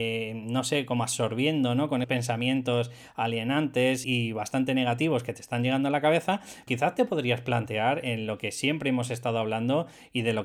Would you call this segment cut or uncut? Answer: cut